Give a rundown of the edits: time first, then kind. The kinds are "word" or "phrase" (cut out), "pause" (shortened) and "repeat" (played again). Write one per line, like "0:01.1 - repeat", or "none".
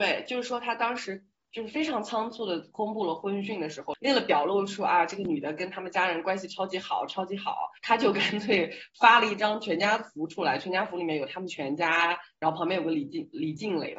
none

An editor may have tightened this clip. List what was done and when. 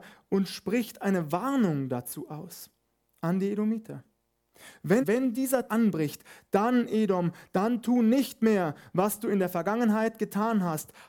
0:05.0 - phrase
0:05.7 - word

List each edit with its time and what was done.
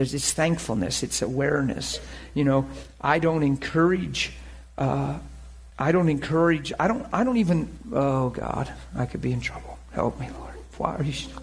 0:05.7 - pause

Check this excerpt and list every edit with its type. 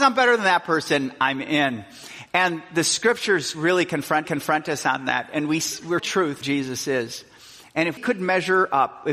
0:03.5 - word
0:04.2 - repeat
0:06.0 - phrase
0:06.4 - phrase
0:08.0 - word

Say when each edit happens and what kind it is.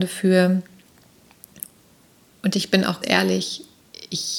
0:03.0 - word

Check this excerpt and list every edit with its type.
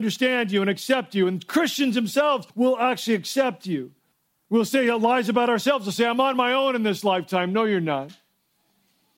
0:02.5 - pause
0:04.1 - pause

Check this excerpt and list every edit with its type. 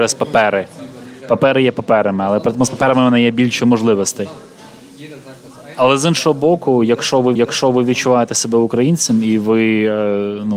0:07.3 - repeat

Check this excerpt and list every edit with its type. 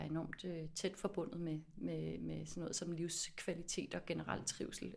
none

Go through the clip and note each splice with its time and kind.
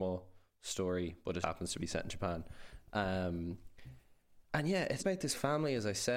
0:01.4 - word
0:05.0 - word

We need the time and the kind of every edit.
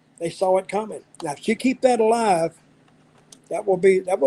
0:01.1 - pause
0:01.6 - word

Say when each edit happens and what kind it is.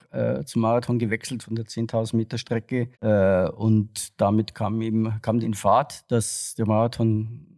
0:01.4 - word
0:02.9 - pause
0:05.4 - phrase

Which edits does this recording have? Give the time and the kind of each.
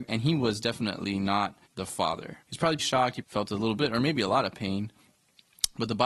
0:01.7 - pause
0:02.4 - pause
0:02.8 - word
0:03.2 - word
0:03.8 - phrase

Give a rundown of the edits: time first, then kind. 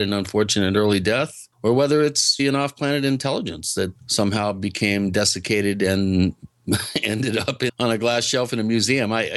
0:01.5 - pause
0:02.4 - word
0:04.0 - word
0:07.7 - word

